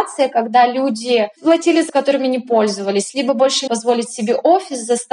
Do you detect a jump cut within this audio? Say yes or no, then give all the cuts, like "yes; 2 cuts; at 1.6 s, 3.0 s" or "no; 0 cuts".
yes; 2 cuts; at 1.9 s, 3.7 s